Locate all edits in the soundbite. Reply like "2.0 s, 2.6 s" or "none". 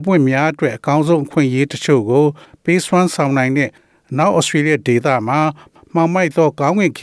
none